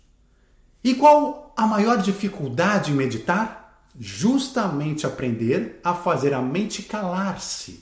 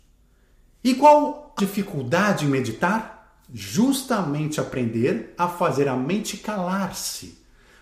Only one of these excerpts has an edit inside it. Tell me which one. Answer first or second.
second